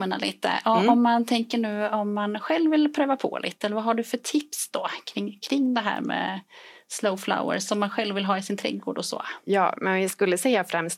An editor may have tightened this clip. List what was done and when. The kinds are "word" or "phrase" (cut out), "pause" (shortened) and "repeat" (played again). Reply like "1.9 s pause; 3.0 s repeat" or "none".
none

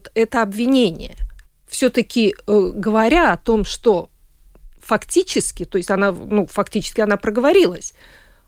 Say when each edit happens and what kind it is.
1.5 s pause

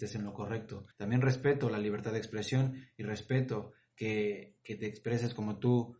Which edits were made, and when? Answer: 0.9 s pause

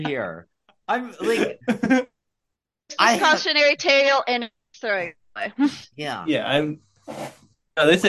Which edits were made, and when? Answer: none

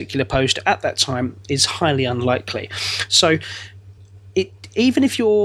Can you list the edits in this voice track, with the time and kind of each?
none

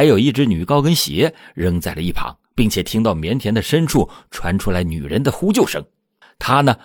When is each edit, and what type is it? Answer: 2.4 s pause

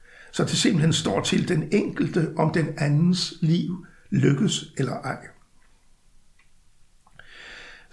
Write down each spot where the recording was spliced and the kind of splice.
none

